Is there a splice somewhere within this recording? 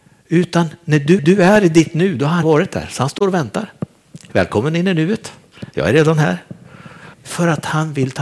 yes; 3 cuts; at 1.2 s, 2.4 s, 7.1 s

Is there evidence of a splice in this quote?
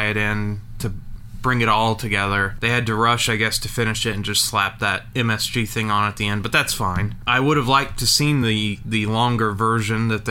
no; 0 cuts

